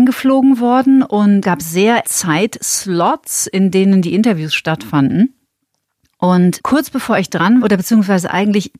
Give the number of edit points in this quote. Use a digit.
4